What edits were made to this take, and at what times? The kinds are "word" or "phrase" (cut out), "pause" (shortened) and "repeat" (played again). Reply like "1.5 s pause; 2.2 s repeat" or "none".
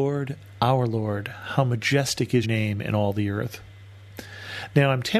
2.4 s word